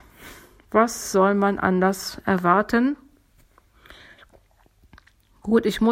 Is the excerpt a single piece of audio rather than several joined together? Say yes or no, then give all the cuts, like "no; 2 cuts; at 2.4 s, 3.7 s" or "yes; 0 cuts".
yes; 0 cuts